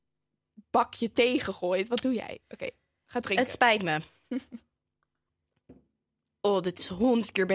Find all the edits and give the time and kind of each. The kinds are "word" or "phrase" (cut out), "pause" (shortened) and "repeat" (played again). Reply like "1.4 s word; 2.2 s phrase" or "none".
none